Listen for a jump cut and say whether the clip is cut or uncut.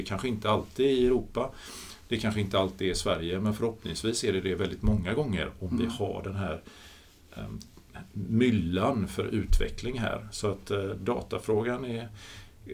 uncut